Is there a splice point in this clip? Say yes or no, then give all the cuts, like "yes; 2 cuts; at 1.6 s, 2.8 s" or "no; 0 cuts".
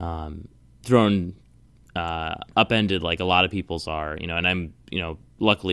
no; 0 cuts